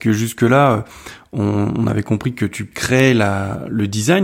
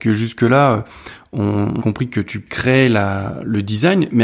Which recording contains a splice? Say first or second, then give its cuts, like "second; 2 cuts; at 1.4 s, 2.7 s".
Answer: second; 1 cut; at 1.8 s